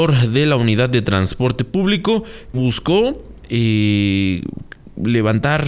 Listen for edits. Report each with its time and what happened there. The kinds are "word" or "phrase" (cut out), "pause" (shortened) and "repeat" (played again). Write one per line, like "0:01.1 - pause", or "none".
0:02.5 - word